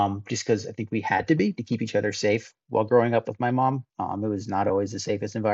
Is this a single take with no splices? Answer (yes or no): no